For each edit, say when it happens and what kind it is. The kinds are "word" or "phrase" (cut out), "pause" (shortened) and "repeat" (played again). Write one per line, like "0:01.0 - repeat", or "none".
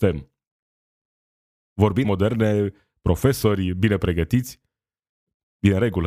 0:02.0 - phrase